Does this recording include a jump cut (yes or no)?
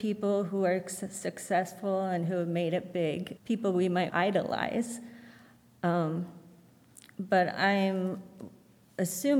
yes